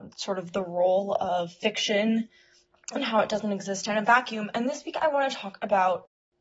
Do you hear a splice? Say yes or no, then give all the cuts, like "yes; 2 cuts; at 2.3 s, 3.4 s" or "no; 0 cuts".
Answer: no; 0 cuts